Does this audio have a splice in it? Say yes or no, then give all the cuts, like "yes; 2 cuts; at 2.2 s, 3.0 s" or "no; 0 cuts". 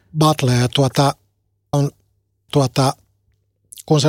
yes; 2 cuts; at 1.7 s, 2.5 s